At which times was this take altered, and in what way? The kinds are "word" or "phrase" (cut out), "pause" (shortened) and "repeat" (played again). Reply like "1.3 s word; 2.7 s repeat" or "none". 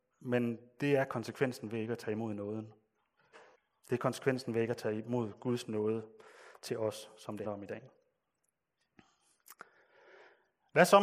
3.5 s pause; 7.4 s word